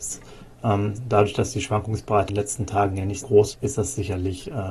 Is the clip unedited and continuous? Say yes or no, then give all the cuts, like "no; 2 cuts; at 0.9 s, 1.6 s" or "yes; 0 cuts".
no; 3 cuts; at 2.3 s, 3.2 s, 3.5 s